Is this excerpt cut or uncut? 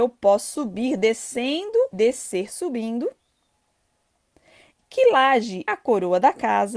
cut